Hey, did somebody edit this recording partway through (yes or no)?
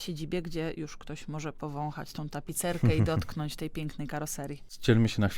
no